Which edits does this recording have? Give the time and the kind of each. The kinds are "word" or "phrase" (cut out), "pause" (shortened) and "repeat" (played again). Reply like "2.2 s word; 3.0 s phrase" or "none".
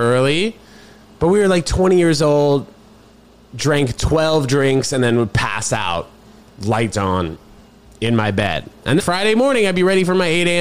6.9 s phrase; 9.0 s word